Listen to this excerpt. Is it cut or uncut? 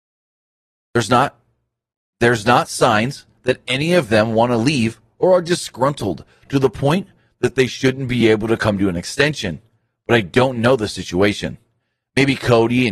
uncut